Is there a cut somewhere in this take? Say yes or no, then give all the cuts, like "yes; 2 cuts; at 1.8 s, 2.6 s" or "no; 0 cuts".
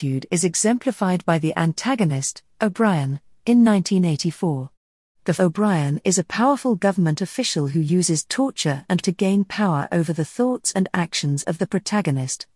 yes; 2 cuts; at 5.4 s, 9.0 s